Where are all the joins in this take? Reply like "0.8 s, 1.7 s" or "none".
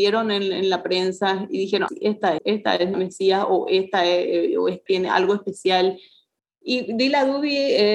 1.9 s, 2.4 s, 2.9 s, 4.9 s